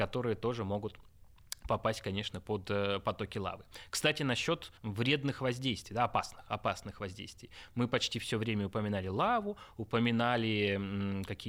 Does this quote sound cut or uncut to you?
cut